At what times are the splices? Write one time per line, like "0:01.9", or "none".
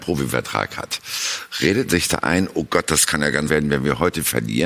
0:01.9
0:03.5